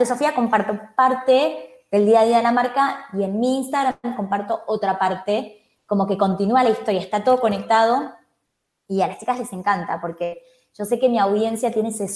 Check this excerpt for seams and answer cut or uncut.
uncut